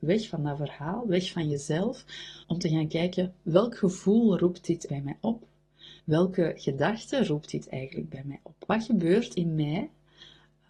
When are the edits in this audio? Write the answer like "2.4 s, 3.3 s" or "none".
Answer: 2.4 s, 4.9 s, 6.0 s, 9.3 s